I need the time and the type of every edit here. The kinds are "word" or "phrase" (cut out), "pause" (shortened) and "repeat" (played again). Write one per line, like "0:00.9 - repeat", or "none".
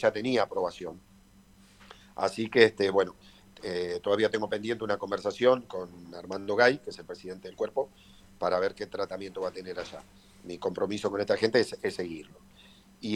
none